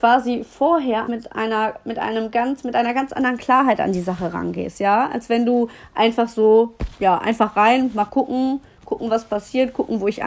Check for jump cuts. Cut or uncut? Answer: cut